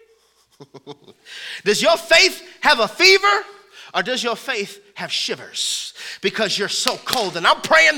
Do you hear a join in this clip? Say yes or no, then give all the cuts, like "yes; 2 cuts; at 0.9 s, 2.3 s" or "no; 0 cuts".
no; 0 cuts